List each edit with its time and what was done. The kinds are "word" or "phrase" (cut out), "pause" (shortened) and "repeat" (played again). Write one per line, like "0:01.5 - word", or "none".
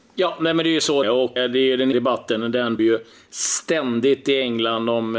0:01.0 - word
0:01.4 - word
0:01.9 - word
0:02.8 - word